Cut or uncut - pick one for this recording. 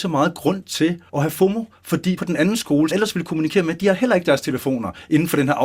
cut